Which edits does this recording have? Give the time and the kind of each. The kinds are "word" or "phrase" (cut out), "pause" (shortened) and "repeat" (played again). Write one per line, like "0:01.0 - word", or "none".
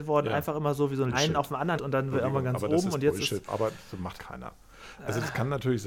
0:01.1 - word
0:01.8 - word
0:02.1 - word
0:03.5 - word
0:04.2 - word